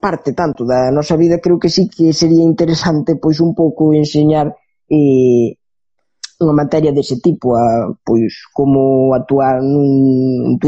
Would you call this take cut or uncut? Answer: uncut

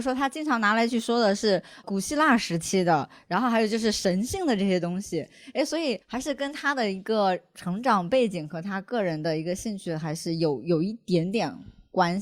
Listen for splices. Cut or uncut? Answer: cut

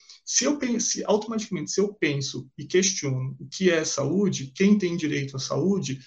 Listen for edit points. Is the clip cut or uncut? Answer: uncut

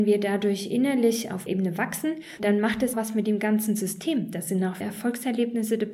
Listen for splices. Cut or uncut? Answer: cut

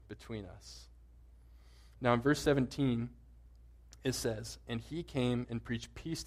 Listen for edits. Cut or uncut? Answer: uncut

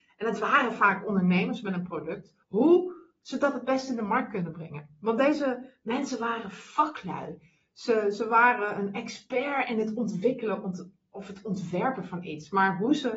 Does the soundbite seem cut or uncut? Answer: cut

